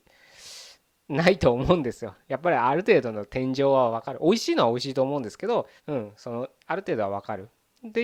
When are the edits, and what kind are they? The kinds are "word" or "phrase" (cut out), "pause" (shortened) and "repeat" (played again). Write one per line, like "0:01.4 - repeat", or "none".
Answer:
0:05.8 - pause